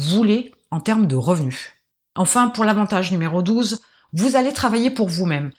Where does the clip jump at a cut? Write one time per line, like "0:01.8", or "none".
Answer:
none